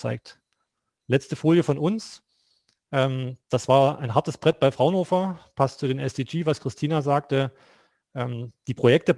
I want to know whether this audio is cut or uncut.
uncut